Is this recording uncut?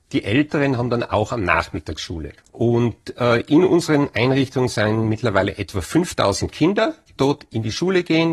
no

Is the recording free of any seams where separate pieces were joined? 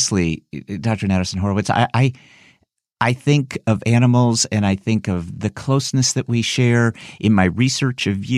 yes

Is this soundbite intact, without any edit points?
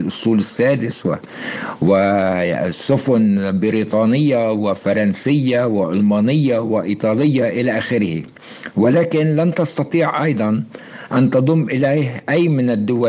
yes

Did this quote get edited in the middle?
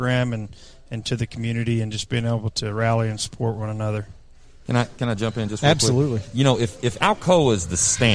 no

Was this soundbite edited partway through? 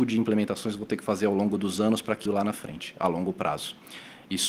yes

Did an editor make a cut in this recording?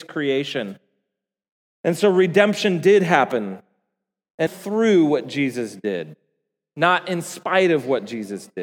yes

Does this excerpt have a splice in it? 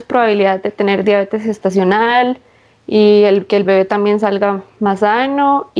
no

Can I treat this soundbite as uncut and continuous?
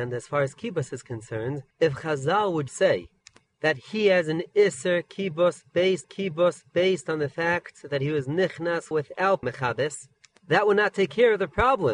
no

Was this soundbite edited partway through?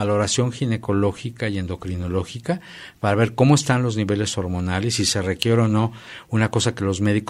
no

